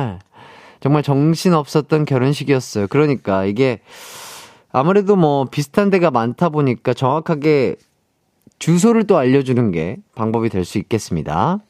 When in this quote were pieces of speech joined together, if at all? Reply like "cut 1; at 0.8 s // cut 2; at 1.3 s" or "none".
none